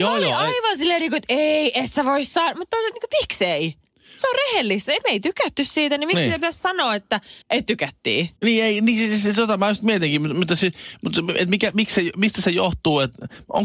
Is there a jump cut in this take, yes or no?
yes